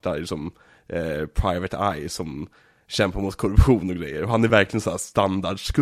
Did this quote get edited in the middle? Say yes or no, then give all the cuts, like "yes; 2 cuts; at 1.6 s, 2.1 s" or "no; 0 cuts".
no; 0 cuts